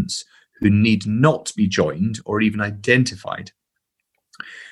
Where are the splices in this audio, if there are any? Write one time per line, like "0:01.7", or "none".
none